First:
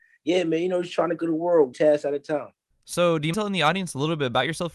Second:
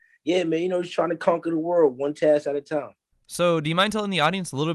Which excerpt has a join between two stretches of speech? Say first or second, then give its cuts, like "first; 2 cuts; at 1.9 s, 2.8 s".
first; 3 cuts; at 1.2 s, 1.7 s, 3.3 s